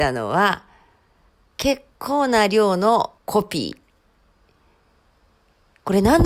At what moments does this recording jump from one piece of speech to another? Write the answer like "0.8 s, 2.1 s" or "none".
3.2 s

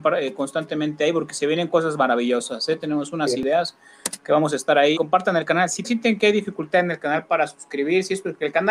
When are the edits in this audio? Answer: 4.9 s, 5.8 s

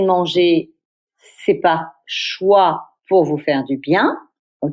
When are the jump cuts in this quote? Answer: none

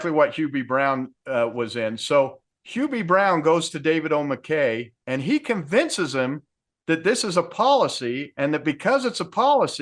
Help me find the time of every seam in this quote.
5.0 s

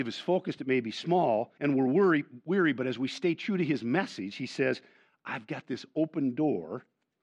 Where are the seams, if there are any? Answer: 1.6 s

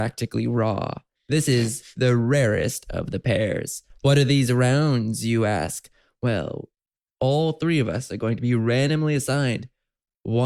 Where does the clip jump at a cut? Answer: none

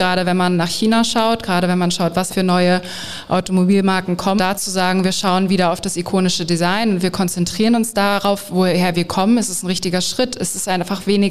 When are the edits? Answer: 2.3 s, 4.4 s

